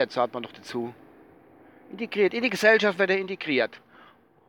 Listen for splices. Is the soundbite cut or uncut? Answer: uncut